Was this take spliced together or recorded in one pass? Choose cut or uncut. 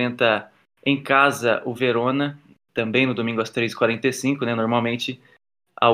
uncut